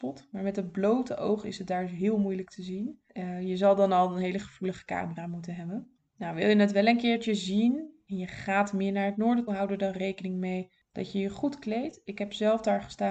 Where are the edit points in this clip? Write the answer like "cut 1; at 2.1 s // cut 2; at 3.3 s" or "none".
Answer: cut 1; at 9.5 s